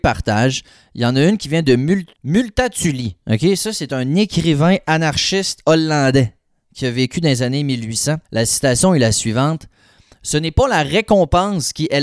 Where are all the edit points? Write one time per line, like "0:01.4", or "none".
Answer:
0:02.1
0:08.2